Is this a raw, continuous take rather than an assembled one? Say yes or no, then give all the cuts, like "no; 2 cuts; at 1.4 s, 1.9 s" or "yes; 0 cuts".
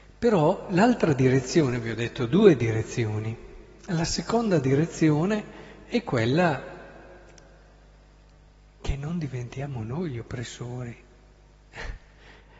yes; 0 cuts